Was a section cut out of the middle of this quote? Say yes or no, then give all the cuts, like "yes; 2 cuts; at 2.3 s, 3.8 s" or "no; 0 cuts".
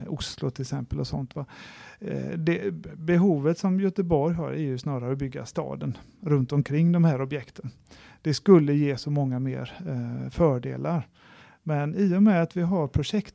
no; 0 cuts